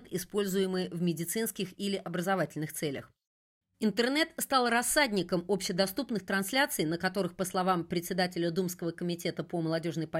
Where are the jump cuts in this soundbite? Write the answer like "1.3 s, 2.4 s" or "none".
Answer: none